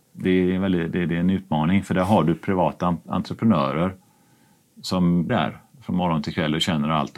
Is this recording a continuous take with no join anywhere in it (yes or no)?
no